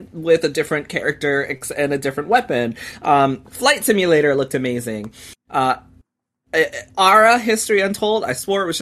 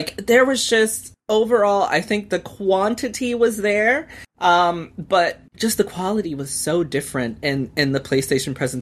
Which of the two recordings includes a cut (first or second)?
second